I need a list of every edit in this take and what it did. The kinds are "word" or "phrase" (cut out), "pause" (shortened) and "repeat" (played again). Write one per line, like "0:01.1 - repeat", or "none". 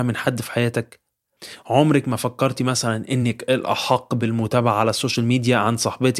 none